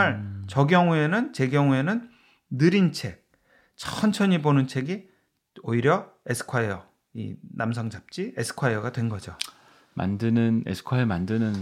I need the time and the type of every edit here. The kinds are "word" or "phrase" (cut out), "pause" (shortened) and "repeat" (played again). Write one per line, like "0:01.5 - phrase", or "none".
none